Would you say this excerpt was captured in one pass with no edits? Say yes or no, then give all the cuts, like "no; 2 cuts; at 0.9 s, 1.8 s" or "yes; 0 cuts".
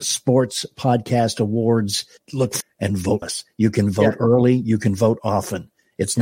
no; 2 cuts; at 2.6 s, 3.2 s